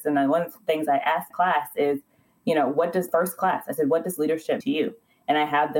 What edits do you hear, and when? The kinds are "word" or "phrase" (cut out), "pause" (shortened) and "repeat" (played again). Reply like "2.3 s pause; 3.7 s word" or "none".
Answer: 1.3 s word; 3.1 s word; 4.6 s word